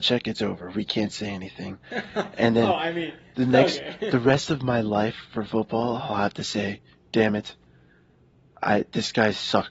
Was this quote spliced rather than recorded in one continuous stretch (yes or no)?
no